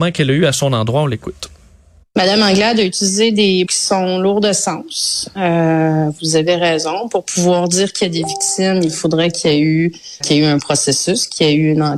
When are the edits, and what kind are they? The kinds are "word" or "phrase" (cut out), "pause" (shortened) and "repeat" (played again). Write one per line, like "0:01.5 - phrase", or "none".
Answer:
0:03.6 - word
0:10.2 - word